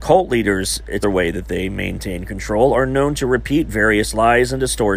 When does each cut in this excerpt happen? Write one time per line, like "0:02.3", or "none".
0:01.0